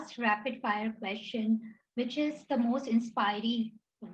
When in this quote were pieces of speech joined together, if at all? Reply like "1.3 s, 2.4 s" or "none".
1.9 s